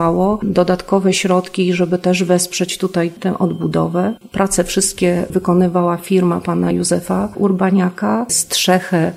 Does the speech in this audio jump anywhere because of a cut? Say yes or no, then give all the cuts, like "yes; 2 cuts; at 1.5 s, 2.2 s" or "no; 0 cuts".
no; 0 cuts